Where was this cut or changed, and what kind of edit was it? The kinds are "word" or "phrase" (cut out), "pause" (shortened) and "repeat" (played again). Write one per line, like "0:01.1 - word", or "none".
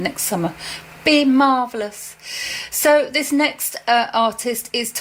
none